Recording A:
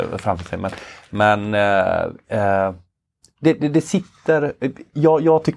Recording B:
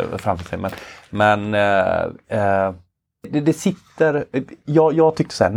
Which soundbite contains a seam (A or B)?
B